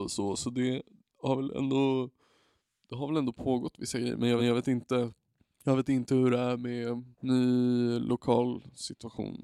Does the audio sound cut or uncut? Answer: cut